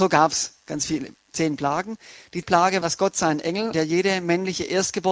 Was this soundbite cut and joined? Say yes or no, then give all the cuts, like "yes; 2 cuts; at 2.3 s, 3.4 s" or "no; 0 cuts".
yes; 3 cuts; at 2.4 s, 2.8 s, 3.7 s